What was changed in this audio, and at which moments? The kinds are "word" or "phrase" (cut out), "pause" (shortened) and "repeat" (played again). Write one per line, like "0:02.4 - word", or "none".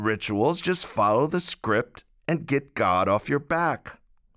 none